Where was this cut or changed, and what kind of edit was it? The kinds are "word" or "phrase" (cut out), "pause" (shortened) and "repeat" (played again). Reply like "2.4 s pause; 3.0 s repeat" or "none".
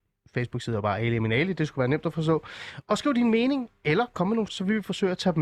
4.5 s word